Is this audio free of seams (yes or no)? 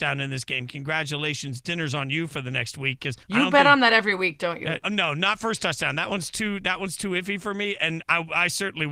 no